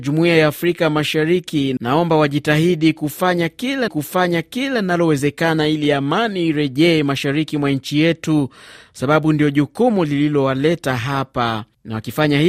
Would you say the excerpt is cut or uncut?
cut